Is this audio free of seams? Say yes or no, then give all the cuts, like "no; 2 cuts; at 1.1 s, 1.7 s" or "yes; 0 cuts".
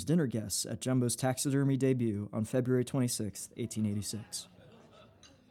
yes; 0 cuts